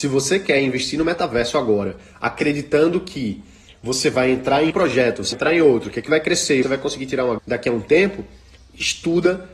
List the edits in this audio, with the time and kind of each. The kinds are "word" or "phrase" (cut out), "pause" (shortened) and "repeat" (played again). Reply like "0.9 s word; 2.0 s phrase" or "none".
4.7 s word; 5.3 s word; 6.1 s word; 6.6 s word; 7.4 s word

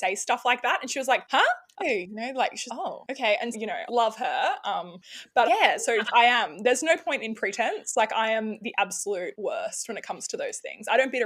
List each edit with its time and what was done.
1.8 s phrase; 2.7 s word; 3.5 s word; 3.9 s word; 5.5 s word; 6.0 s word

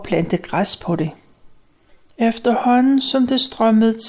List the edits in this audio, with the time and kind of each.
none

